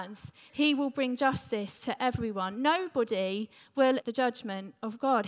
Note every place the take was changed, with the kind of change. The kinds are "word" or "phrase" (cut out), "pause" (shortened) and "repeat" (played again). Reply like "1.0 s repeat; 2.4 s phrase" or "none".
4.0 s word